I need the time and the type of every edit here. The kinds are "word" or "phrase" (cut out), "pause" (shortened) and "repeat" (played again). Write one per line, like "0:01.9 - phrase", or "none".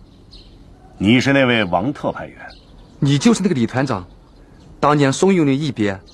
none